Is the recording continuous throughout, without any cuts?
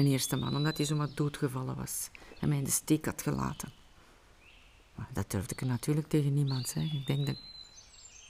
yes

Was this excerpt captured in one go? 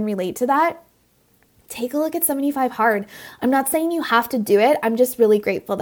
yes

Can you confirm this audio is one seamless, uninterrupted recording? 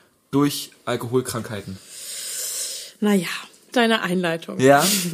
no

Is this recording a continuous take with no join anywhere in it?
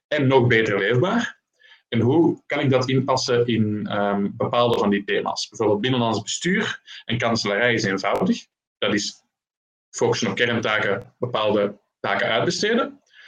yes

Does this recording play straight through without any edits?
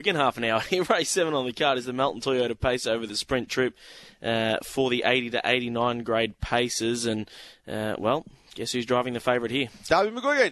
yes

